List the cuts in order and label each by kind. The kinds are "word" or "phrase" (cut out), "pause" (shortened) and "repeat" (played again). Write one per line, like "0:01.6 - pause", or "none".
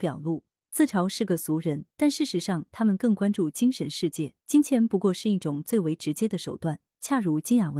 0:01.9 - pause
0:04.4 - pause